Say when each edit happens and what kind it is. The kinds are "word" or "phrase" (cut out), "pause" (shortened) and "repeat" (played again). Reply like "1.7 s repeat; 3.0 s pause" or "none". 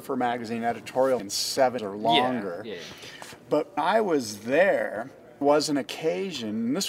1.2 s word; 1.8 s word; 3.8 s word; 5.4 s word